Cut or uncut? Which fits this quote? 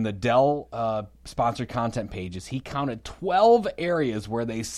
uncut